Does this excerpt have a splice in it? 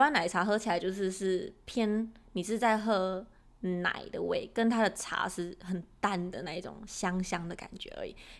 yes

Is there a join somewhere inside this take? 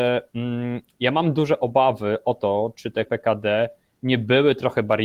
yes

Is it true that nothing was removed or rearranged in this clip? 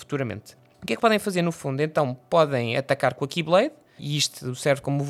no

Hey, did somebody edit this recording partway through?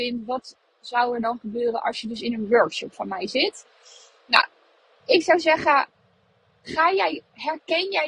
no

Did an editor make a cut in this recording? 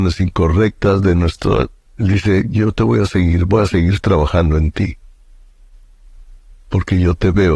yes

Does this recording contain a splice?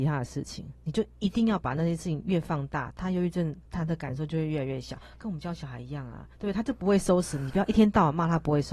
yes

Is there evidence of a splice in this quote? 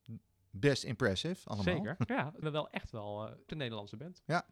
yes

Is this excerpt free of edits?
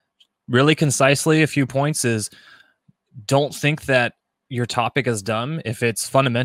yes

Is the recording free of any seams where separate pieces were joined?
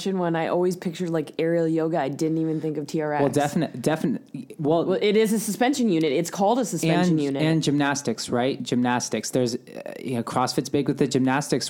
yes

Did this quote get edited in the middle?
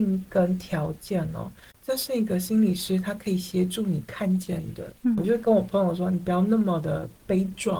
no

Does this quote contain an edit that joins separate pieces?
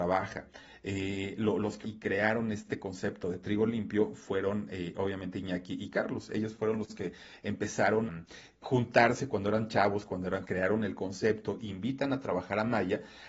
yes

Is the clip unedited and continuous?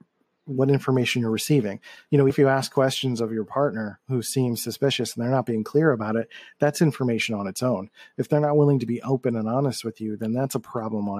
no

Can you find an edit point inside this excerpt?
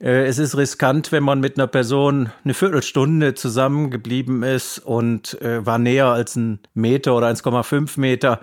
yes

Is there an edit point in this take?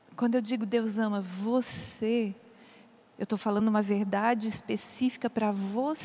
no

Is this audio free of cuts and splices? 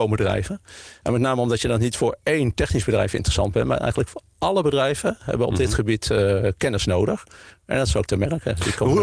no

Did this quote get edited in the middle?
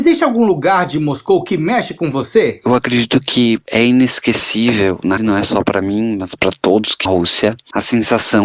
yes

